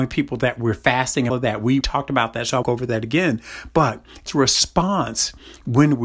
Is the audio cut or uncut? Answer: cut